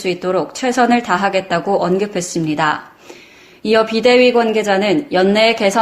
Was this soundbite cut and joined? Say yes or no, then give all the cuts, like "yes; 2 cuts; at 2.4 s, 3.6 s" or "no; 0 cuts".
no; 0 cuts